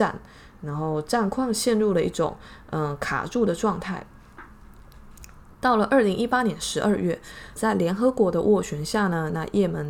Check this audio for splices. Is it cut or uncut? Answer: cut